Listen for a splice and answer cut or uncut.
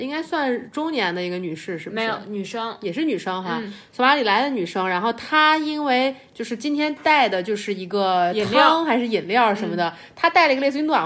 uncut